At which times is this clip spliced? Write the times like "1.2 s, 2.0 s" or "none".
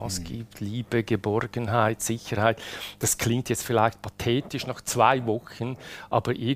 none